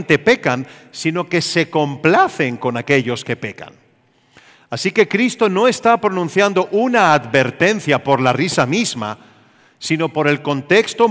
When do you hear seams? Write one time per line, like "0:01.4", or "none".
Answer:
none